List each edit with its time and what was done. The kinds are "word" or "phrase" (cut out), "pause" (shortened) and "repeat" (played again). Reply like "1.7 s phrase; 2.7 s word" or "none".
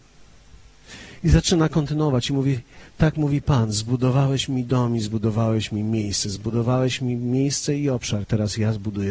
none